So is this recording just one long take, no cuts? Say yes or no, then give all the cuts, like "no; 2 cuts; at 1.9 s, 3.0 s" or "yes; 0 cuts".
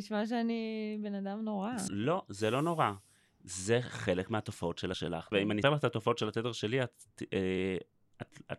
no; 4 cuts; at 1.9 s, 4.9 s, 5.3 s, 5.6 s